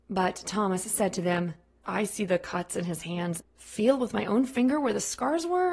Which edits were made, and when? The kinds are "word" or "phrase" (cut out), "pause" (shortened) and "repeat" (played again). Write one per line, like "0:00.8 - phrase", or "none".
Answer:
0:01.8 - word
0:03.4 - word